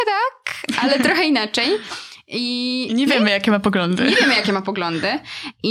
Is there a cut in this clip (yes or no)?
no